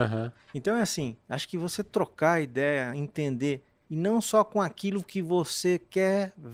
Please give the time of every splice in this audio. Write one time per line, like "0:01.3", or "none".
0:01.2